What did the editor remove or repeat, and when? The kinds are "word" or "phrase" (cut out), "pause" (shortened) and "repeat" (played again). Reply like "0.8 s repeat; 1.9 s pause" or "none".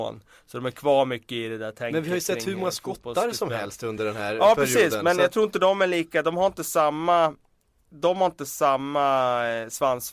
none

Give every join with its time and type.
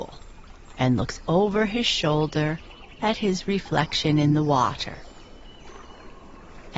none

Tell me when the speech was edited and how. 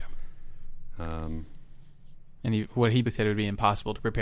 3.0 s word

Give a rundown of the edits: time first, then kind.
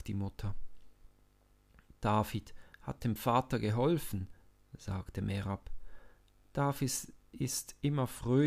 none

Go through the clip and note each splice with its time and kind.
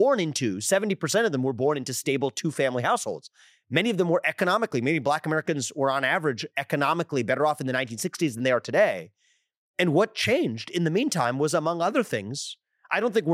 none

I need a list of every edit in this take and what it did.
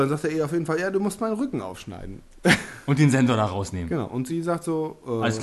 none

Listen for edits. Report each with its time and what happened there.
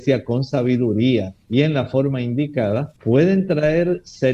3.0 s pause

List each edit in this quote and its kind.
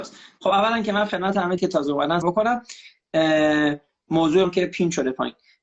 1.6 s word; 2.2 s word; 4.4 s word

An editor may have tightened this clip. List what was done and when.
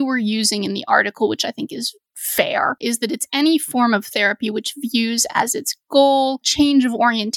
2.8 s word

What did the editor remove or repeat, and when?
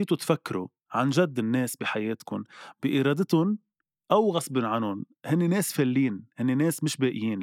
none

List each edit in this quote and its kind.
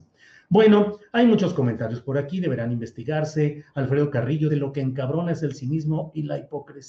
4.5 s word

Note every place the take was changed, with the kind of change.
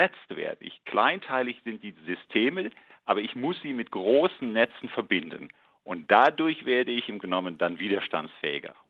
7.2 s word

